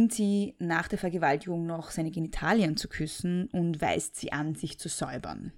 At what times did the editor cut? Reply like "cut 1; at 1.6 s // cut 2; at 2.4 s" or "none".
none